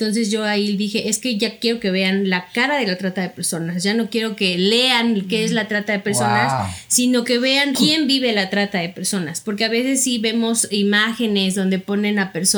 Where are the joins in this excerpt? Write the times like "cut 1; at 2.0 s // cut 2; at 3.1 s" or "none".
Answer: cut 1; at 7.7 s